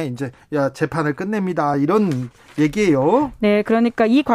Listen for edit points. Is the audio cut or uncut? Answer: uncut